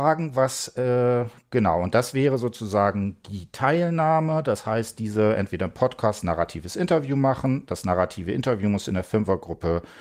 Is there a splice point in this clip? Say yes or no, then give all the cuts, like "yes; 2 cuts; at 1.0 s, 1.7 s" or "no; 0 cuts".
no; 0 cuts